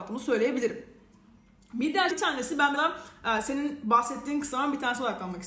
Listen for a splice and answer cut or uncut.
cut